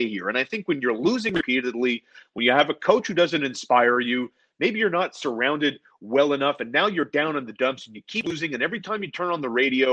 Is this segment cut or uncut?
uncut